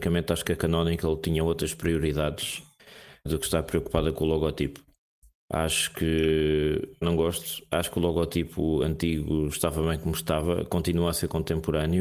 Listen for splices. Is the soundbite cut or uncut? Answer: cut